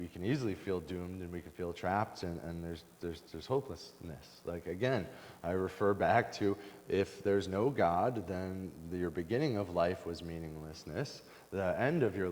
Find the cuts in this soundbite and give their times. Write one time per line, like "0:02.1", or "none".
none